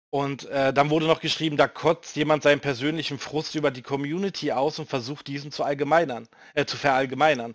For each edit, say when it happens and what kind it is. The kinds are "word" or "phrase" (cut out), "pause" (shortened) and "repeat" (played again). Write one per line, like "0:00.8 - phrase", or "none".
none